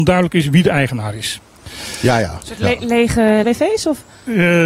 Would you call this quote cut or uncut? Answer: cut